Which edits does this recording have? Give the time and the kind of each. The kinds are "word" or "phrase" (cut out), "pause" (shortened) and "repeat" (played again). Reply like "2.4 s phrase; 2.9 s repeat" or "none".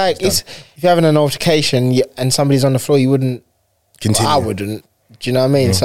none